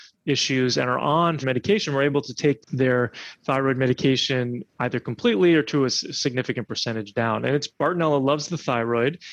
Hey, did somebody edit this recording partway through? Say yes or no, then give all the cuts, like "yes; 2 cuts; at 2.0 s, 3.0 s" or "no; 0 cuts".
yes; 3 cuts; at 1.4 s, 2.6 s, 7.7 s